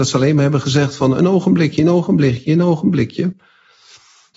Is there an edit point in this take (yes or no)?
no